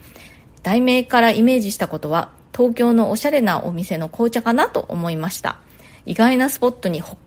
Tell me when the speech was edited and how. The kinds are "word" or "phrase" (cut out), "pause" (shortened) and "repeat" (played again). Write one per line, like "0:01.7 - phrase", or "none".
none